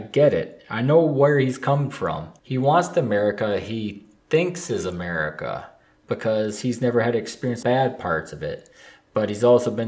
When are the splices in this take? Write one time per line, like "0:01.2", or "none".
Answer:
0:02.4
0:04.2
0:07.6